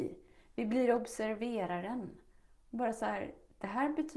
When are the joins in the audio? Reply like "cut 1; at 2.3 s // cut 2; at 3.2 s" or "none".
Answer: none